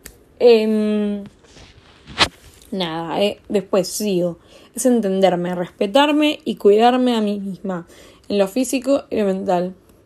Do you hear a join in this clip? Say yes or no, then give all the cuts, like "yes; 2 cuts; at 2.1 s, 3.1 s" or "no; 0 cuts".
no; 0 cuts